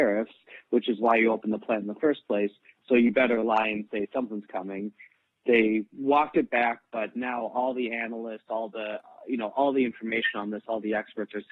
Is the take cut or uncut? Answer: uncut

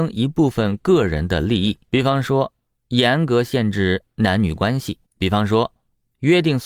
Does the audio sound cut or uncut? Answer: cut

